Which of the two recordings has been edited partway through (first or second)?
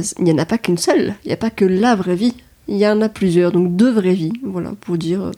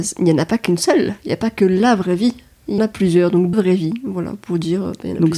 second